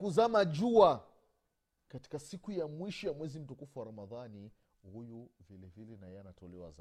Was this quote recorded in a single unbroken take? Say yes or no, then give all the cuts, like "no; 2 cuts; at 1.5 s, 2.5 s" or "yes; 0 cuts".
yes; 0 cuts